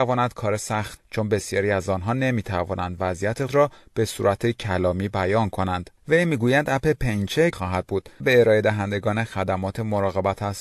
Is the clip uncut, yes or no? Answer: no